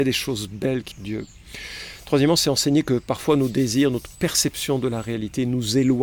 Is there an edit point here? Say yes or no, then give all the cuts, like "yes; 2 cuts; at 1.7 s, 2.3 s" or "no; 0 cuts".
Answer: yes; 1 cut; at 0.9 s